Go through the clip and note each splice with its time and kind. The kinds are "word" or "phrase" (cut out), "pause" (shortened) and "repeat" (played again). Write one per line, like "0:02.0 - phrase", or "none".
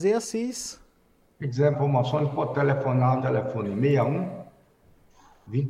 0:01.7 - word
0:03.2 - word